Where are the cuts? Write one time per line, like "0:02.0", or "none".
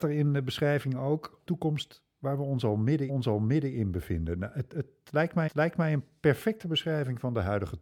0:01.5
0:03.1
0:05.5